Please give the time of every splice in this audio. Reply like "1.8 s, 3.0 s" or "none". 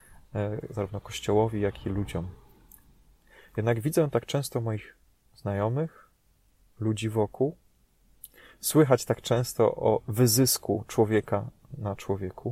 none